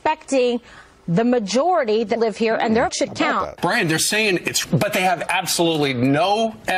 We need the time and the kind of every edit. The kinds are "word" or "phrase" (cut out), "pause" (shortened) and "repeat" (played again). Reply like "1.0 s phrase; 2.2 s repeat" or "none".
2.2 s word; 2.9 s word; 4.6 s word